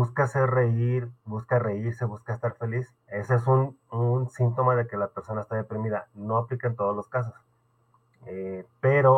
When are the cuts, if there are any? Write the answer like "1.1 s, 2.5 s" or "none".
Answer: 3.0 s